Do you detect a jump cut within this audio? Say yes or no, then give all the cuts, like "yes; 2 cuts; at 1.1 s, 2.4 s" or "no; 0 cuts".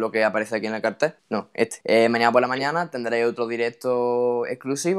yes; 2 cuts; at 1.2 s, 1.8 s